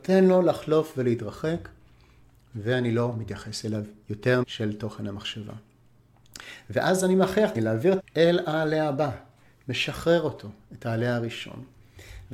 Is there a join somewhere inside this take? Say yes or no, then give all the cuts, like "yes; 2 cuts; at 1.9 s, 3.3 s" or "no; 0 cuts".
yes; 3 cuts; at 4.4 s, 7.6 s, 8.0 s